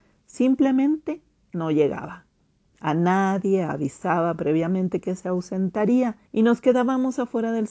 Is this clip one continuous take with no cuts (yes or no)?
no